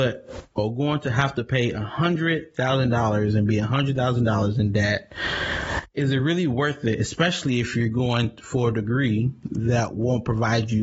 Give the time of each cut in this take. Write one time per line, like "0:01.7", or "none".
none